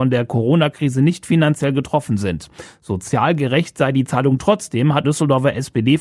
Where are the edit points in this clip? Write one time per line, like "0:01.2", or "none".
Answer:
0:05.0